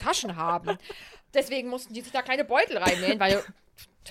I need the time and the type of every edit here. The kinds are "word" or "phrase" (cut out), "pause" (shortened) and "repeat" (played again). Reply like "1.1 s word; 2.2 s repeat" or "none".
none